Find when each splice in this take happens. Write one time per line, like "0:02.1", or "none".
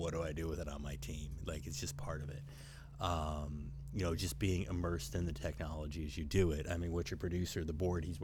none